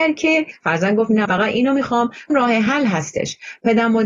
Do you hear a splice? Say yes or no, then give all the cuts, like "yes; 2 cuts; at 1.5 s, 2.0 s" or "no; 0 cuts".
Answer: yes; 2 cuts; at 1.2 s, 2.3 s